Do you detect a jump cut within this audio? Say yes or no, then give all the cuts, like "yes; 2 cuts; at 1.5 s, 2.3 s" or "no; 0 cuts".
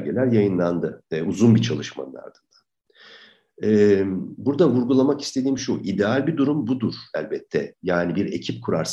no; 0 cuts